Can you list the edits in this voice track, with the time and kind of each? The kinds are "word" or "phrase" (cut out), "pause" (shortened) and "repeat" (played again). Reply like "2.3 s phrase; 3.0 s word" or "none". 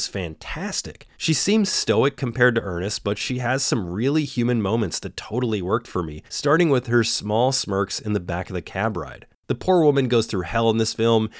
1.1 s pause; 6.3 s pause